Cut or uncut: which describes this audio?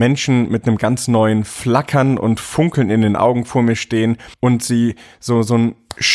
cut